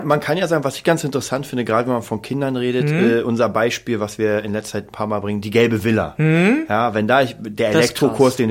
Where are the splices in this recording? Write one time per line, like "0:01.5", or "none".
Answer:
none